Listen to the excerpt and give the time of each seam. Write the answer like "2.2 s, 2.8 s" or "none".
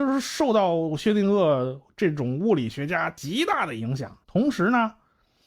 4.2 s